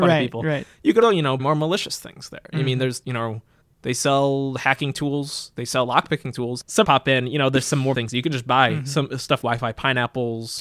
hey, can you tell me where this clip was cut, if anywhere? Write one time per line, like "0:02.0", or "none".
0:01.0
0:01.4
0:03.0
0:03.6
0:06.8
0:07.9
0:09.4